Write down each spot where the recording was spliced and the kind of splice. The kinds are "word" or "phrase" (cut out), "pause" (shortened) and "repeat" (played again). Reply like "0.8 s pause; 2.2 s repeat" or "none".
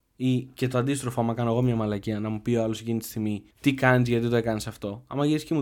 3.5 s pause